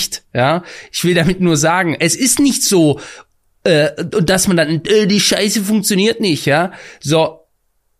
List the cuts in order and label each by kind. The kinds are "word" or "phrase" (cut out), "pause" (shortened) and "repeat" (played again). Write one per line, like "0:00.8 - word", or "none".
none